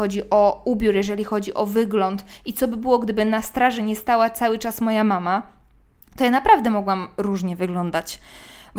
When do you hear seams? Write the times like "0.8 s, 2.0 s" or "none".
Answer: none